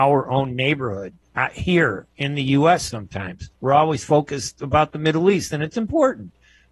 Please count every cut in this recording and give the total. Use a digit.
2